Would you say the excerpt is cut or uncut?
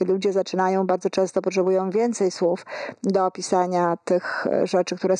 uncut